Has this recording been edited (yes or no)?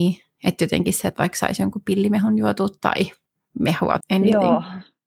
yes